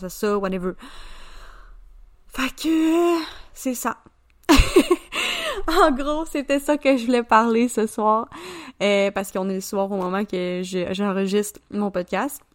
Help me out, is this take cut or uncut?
cut